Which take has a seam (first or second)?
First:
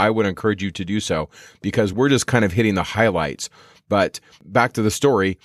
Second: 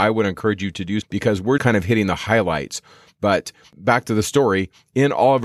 second